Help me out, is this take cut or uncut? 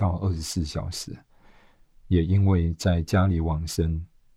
uncut